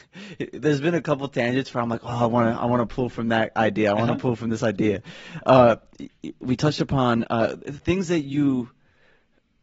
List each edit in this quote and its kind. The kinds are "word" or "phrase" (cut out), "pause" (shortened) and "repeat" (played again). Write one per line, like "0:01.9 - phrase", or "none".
0:06.4 - word